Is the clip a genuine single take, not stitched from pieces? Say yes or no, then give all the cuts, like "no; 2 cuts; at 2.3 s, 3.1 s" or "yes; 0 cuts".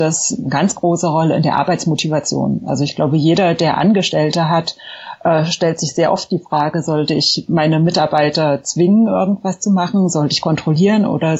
yes; 0 cuts